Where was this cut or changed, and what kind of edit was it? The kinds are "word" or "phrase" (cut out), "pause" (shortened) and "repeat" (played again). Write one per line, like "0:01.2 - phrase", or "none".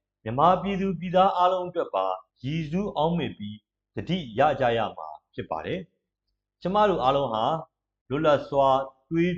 0:02.3 - pause